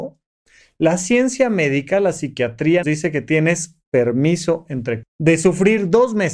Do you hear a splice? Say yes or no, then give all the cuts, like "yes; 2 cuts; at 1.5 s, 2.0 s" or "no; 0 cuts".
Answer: yes; 2 cuts; at 2.8 s, 5.0 s